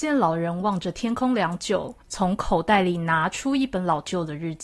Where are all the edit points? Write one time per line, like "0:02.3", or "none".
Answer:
0:02.0